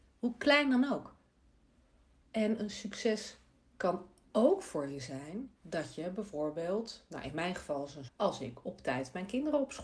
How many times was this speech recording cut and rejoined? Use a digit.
2